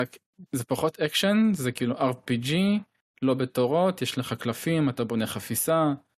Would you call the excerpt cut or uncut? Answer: uncut